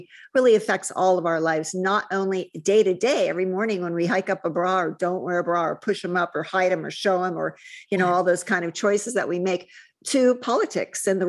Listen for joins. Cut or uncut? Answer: uncut